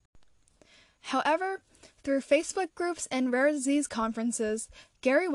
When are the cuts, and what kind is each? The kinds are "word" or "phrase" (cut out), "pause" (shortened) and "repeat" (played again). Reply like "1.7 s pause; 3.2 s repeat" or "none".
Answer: none